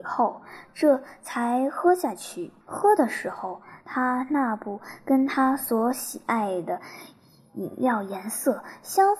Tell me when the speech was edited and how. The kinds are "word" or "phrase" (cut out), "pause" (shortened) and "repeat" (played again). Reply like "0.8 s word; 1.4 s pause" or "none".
2.6 s pause